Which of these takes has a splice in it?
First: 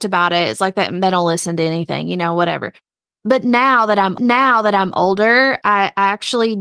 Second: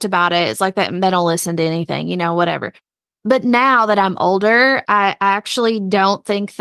first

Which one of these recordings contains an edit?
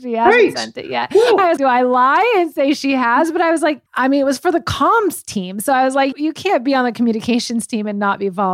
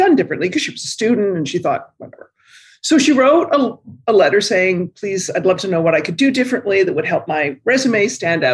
first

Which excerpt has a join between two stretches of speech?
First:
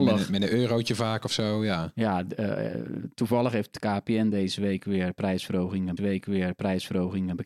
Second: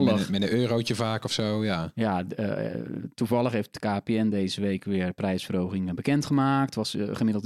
first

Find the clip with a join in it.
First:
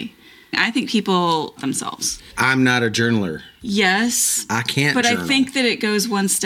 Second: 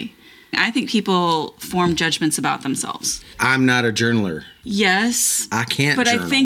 first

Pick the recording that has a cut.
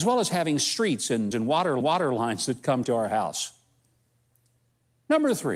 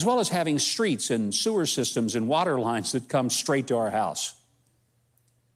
first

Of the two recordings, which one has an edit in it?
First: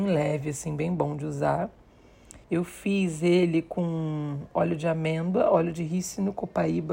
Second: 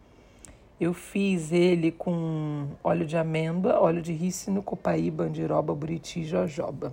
first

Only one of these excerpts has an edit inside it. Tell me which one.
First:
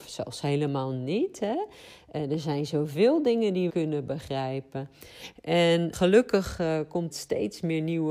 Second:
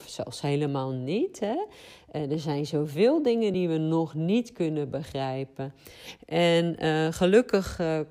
first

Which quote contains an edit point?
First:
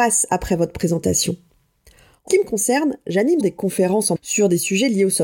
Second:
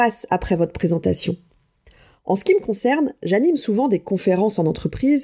first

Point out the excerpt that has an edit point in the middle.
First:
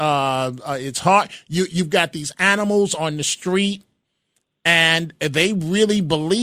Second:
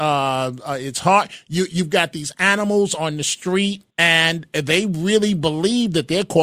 second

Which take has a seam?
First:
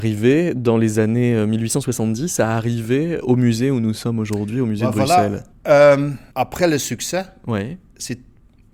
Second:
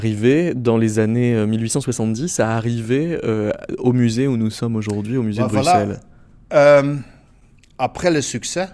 first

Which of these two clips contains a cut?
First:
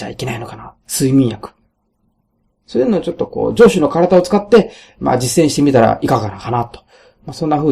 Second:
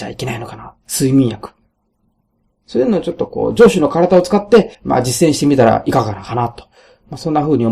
second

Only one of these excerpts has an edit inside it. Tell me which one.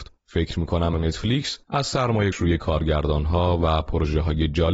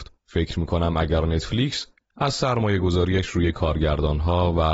first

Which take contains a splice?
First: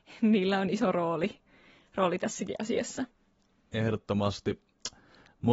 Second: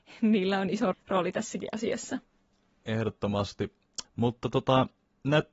second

